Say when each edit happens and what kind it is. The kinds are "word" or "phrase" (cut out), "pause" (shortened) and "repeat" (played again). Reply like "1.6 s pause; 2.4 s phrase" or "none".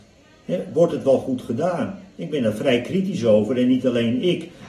none